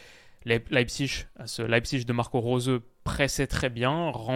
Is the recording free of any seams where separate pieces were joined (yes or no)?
yes